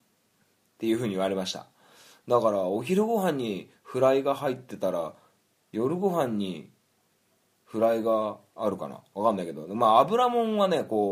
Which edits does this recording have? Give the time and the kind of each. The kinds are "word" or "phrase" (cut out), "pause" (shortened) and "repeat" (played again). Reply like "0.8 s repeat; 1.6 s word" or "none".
none